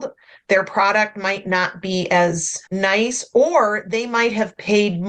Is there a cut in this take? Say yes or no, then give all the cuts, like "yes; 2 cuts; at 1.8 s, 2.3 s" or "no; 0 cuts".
yes; 1 cut; at 2.7 s